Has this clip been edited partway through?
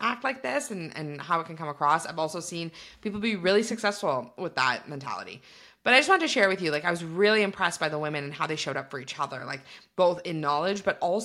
no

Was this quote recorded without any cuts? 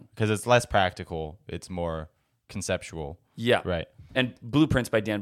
yes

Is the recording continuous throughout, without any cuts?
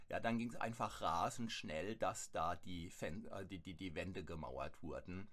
yes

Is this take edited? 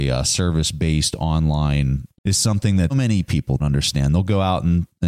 yes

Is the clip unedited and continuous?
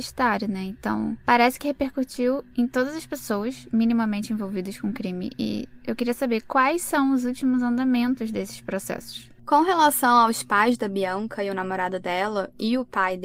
yes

